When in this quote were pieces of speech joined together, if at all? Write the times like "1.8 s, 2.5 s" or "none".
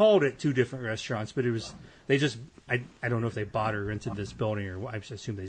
none